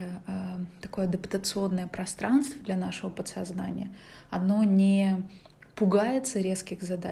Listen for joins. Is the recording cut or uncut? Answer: uncut